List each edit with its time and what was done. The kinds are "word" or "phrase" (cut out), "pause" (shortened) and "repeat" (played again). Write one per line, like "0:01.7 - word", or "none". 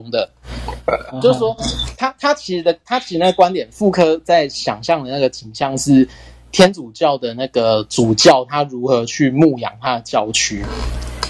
none